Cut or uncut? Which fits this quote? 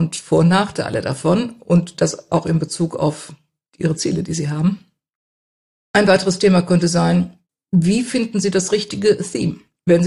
uncut